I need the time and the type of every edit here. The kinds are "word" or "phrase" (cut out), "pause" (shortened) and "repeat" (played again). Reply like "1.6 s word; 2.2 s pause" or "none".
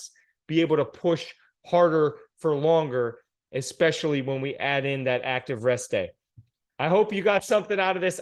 none